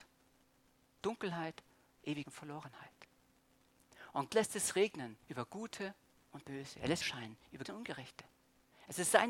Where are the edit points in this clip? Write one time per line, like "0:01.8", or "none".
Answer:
0:01.0
0:02.3
0:04.3
0:05.2
0:07.0
0:07.7